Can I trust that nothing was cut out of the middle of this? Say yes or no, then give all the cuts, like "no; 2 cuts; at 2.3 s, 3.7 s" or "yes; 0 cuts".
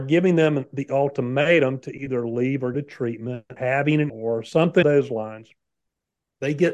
no; 4 cuts; at 2.7 s, 3.6 s, 4.1 s, 4.8 s